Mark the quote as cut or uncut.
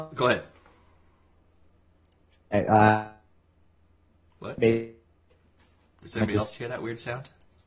uncut